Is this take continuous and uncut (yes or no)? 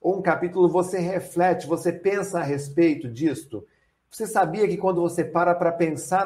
yes